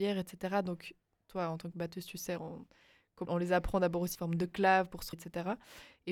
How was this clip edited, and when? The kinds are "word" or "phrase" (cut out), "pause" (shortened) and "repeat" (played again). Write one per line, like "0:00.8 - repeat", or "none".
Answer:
0:03.3 - word
0:04.2 - word
0:05.1 - word